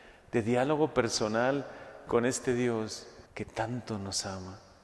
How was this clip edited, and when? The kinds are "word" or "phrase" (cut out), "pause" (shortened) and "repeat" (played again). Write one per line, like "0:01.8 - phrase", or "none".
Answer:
0:03.3 - pause